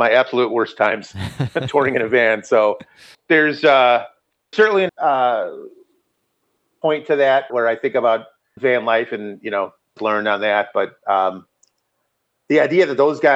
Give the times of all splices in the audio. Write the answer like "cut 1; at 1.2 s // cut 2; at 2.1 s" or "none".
cut 1; at 3.1 s // cut 2; at 4.5 s // cut 3; at 4.9 s // cut 4; at 7.5 s // cut 5; at 8.6 s // cut 6; at 10.0 s